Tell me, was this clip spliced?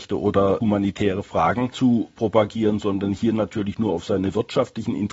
no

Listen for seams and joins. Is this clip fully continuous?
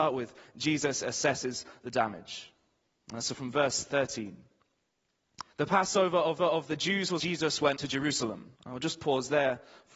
no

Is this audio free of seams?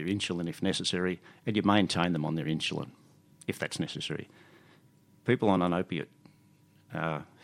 yes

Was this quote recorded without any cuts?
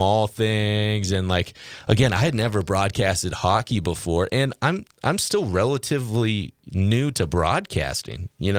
yes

